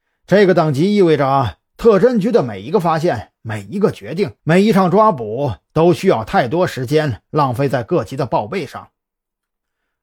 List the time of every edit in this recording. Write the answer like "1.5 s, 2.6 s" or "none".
4.4 s